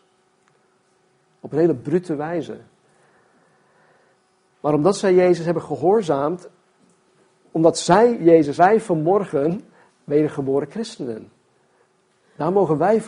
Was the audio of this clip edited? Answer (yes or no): yes